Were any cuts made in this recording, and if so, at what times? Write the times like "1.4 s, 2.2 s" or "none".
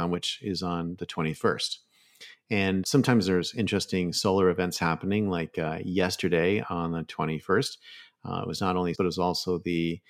2.8 s, 8.9 s